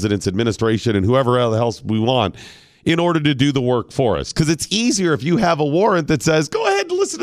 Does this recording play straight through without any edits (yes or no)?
yes